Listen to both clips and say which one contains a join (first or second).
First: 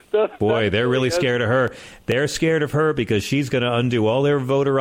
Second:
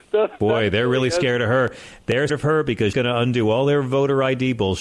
second